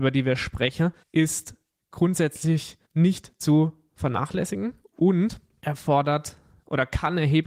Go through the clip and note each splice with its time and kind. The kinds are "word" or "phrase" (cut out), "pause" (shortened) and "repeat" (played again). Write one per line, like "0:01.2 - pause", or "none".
0:01.0 - pause
0:02.8 - pause